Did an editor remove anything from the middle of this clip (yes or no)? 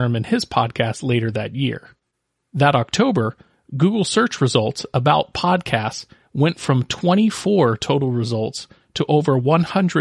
no